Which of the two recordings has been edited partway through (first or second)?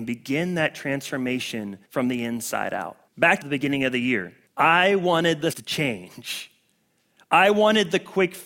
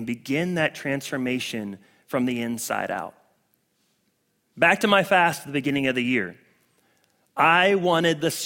first